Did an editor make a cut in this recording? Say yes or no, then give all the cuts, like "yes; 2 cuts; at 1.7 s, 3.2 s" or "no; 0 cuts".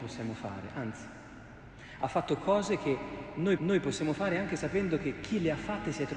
yes; 1 cut; at 3.6 s